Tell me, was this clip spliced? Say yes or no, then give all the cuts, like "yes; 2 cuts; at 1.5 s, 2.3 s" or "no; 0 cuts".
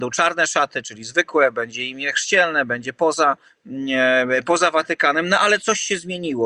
yes; 1 cut; at 3.5 s